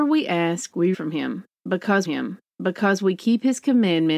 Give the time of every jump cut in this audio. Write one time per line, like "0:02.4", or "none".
0:00.9
0:02.1